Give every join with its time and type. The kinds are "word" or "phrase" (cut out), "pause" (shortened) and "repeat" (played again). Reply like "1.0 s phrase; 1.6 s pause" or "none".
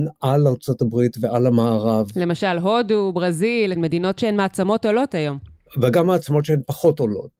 none

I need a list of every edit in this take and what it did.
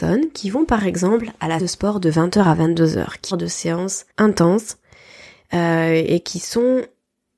1.6 s word; 3.3 s phrase; 4.1 s pause

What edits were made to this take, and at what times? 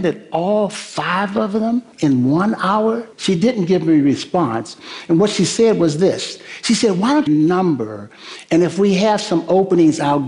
1.9 s pause; 3.1 s pause; 7.3 s phrase

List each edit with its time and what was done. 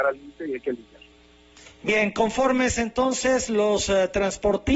none

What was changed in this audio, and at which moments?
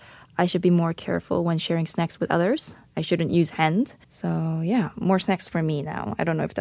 4.0 s pause

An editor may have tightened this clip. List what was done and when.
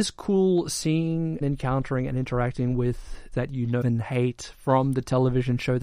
1.4 s word; 3.3 s phrase; 3.8 s word

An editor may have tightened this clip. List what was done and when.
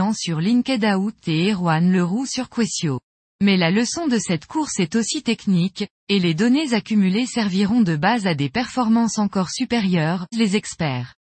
3.3 s pause; 10.3 s phrase

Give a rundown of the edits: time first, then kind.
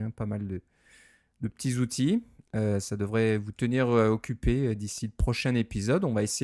none

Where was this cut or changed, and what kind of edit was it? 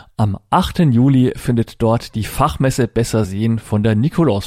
none

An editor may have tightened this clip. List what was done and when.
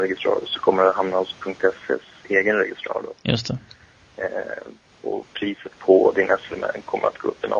3.2 s pause

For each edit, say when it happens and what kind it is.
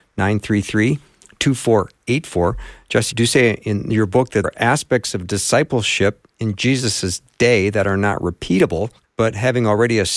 3.1 s word; 4.4 s word; 9.0 s word

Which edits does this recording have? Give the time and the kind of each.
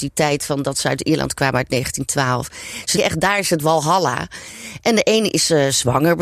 3.0 s word

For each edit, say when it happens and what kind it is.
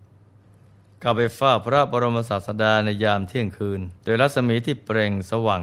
4.0 s pause

